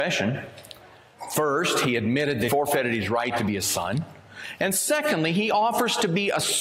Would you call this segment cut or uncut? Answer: cut